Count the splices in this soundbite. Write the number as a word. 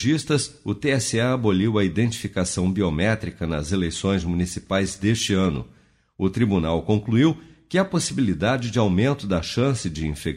zero